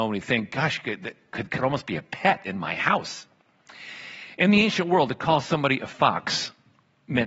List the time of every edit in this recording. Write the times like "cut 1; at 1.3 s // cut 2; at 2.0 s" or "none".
cut 1; at 1.6 s

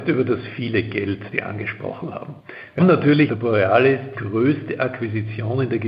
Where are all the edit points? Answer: cut 1; at 1.3 s // cut 2; at 2.8 s // cut 3; at 3.3 s // cut 4; at 4.1 s

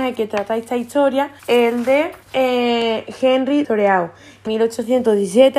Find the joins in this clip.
cut 1; at 1.4 s // cut 2; at 2.2 s // cut 3; at 3.6 s // cut 4; at 4.5 s

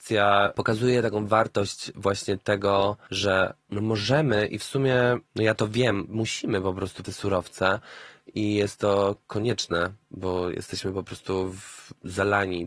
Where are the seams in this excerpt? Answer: cut 1; at 6.1 s // cut 2; at 7.0 s // cut 3; at 10.0 s

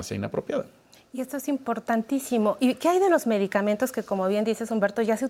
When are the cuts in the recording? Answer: none

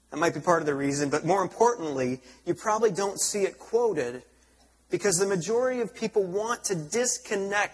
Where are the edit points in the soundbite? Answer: none

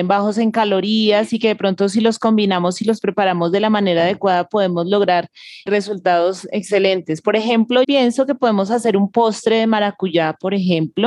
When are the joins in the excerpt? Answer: cut 1; at 5.7 s // cut 2; at 7.8 s

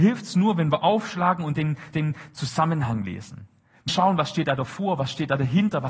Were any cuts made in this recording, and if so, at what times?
cut 1; at 1.9 s // cut 2; at 3.9 s

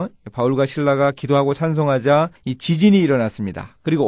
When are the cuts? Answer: cut 1; at 2.4 s

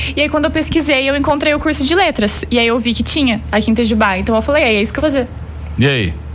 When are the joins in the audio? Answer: cut 1; at 5.0 s

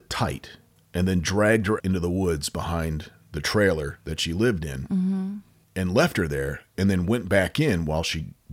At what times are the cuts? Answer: cut 1; at 1.8 s

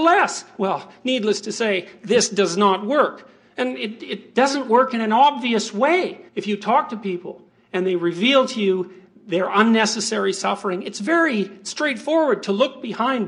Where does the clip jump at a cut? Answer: cut 1; at 6.3 s

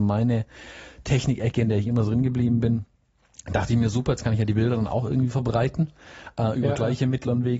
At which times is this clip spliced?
none

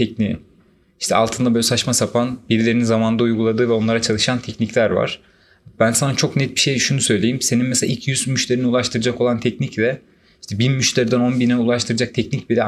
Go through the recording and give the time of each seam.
none

